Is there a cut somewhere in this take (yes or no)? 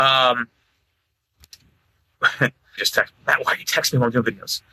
yes